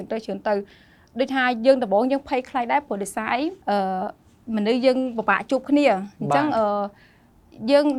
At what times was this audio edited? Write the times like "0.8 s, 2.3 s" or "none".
3.6 s